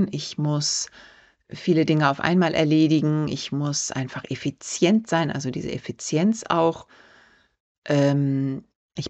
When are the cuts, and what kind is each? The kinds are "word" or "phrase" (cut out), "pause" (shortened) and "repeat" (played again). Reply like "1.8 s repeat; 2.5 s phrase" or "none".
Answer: none